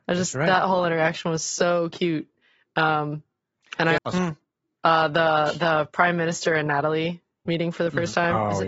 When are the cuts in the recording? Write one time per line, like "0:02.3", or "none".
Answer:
0:04.0